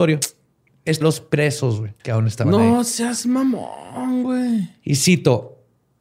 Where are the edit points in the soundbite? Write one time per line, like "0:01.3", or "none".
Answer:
0:01.0
0:02.0